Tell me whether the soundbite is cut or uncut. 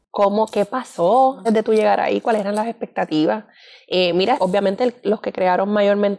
cut